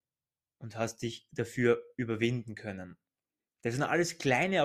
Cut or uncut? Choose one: uncut